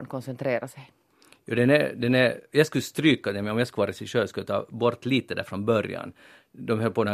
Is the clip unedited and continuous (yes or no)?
yes